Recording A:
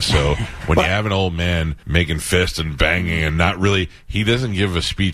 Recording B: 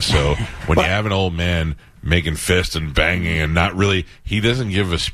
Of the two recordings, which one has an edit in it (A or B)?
A